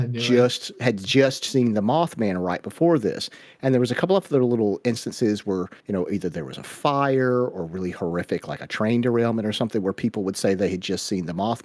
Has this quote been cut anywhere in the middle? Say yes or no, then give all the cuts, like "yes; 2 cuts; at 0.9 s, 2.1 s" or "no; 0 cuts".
yes; 1 cut; at 5.8 s